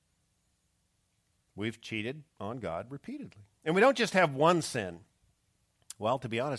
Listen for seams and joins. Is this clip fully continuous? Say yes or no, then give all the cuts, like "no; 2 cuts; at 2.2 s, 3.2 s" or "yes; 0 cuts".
no; 2 cuts; at 2.3 s, 3.5 s